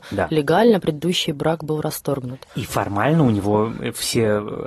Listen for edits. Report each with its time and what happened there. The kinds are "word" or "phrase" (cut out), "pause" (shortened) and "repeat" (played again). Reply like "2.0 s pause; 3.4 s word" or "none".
2.5 s pause